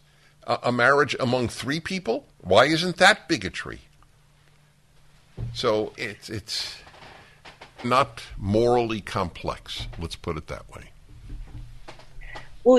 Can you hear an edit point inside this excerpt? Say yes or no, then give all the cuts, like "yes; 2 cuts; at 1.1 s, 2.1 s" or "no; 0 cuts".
yes; 2 cuts; at 5.9 s, 7.8 s